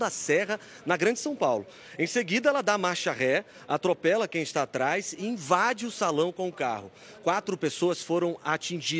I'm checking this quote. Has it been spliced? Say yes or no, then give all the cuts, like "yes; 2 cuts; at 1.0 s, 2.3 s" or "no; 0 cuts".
no; 0 cuts